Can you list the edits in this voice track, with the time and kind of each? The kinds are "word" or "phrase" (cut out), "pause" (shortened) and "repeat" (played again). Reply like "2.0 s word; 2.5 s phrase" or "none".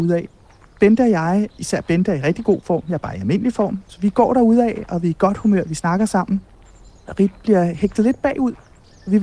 1.5 s pause